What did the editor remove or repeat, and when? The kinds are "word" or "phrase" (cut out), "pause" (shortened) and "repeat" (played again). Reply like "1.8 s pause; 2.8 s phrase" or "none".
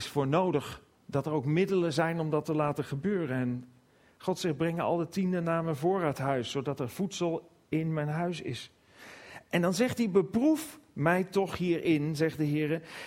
none